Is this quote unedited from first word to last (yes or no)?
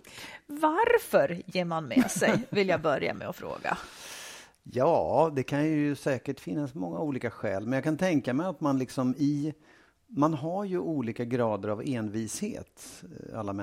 yes